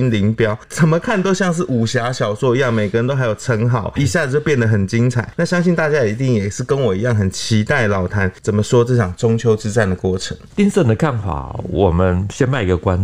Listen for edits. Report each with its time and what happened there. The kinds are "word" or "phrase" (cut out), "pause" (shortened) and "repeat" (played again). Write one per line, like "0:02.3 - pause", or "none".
0:04.0 - word